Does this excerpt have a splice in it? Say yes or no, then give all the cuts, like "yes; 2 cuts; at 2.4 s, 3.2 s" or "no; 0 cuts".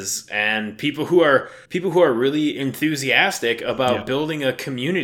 yes; 1 cut; at 1.7 s